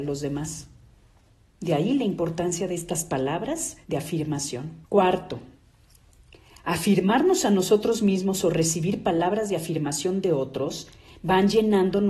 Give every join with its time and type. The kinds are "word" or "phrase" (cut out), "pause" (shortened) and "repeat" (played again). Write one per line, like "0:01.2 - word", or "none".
0:03.8 - pause
0:04.8 - pause